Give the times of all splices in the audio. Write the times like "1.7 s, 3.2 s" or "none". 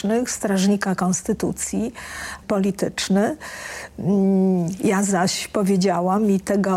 2.4 s